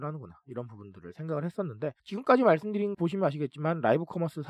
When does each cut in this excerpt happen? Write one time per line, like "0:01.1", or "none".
0:02.0
0:02.9